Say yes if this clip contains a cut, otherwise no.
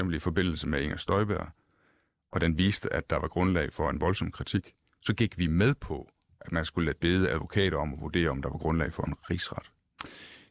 no